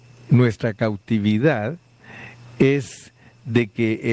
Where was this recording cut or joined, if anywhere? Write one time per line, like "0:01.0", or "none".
none